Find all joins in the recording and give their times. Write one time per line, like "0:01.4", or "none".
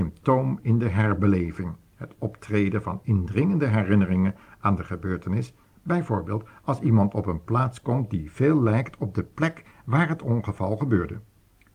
none